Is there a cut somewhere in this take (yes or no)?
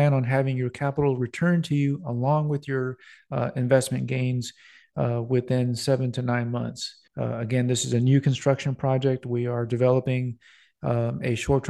yes